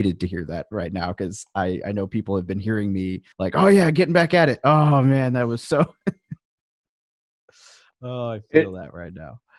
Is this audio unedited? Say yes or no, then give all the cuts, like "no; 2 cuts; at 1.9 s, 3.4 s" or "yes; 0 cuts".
no; 1 cut; at 3.3 s